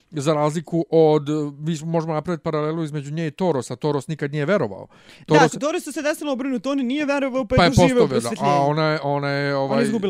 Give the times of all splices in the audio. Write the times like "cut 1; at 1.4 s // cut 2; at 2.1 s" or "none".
none